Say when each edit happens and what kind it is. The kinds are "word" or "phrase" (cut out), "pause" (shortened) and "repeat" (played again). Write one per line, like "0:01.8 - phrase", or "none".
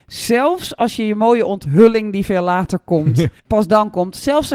0:03.4 - pause